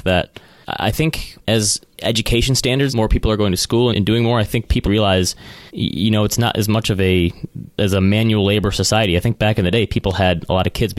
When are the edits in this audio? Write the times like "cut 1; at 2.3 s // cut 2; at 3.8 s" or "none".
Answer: cut 1; at 1.4 s // cut 2; at 2.9 s // cut 3; at 3.9 s // cut 4; at 4.8 s // cut 5; at 5.7 s